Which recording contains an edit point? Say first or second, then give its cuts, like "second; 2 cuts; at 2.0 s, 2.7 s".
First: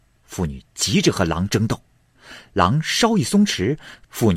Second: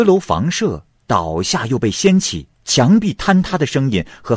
second; 1 cut; at 2.5 s